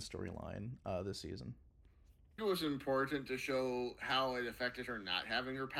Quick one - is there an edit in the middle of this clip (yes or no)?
yes